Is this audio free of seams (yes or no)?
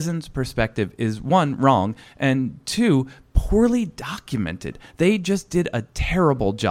yes